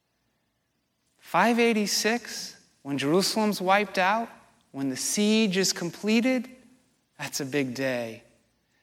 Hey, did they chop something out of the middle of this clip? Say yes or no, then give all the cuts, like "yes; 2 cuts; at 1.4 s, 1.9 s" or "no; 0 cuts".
no; 0 cuts